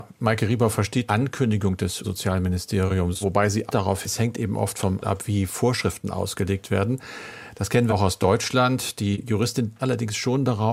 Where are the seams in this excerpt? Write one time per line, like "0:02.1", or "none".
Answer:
0:01.1
0:02.0
0:03.2
0:03.7
0:04.0
0:05.0
0:07.9
0:09.8